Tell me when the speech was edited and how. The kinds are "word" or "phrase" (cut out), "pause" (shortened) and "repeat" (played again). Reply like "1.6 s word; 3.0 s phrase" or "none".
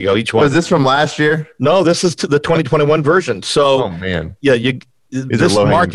none